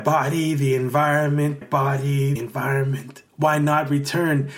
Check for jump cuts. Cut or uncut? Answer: cut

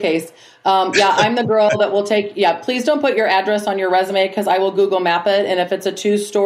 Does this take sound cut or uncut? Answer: uncut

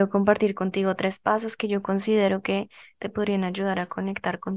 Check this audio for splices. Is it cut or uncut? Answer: uncut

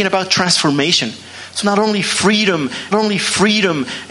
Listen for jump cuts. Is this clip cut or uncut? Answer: cut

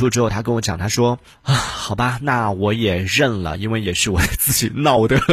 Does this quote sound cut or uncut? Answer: uncut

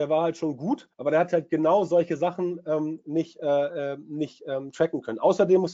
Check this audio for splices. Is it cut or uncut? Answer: cut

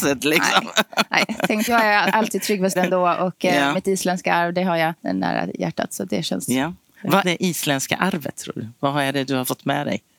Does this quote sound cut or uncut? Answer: cut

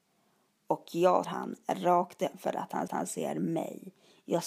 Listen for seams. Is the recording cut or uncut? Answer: cut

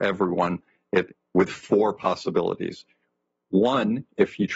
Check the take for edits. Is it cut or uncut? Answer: uncut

